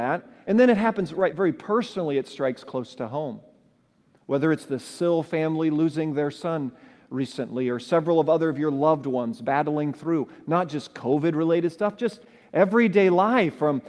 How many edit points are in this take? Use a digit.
0